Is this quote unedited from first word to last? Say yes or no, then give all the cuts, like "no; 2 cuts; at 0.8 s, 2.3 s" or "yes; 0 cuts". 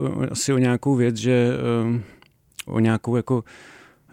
no; 1 cut; at 2.7 s